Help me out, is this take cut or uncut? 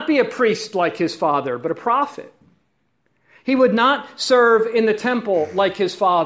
uncut